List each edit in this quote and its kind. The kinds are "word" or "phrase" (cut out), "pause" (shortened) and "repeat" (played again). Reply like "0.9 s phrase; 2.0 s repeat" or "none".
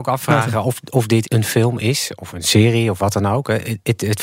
1.2 s word